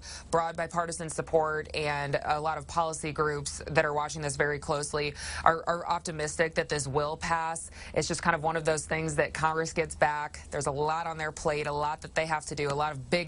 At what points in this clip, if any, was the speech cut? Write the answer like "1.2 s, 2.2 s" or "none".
none